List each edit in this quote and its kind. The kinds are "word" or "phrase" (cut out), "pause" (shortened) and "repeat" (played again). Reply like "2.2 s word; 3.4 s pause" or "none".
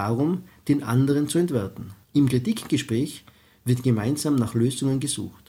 2.0 s pause